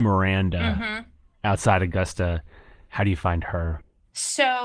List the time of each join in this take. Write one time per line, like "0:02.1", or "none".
none